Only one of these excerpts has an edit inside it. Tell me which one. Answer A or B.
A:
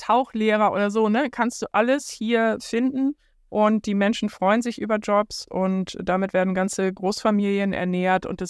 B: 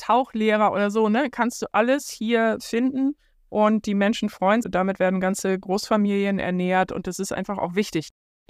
B